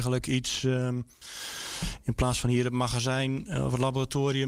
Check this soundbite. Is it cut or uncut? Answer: uncut